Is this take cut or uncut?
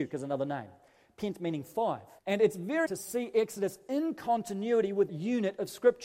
cut